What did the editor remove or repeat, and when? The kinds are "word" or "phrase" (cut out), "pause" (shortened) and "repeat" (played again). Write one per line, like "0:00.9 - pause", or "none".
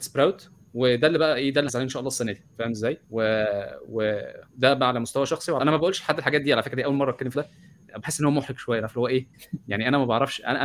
0:01.7 - word
0:03.0 - pause
0:04.5 - pause
0:05.6 - word
0:07.3 - word